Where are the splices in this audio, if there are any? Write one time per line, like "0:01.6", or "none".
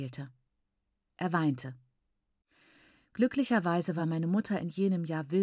none